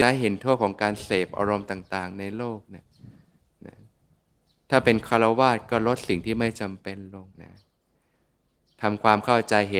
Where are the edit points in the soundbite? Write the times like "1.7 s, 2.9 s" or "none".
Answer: 7.3 s